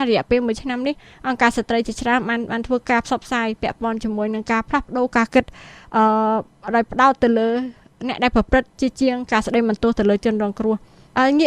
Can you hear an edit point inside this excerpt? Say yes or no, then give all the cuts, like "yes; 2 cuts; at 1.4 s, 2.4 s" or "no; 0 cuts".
no; 0 cuts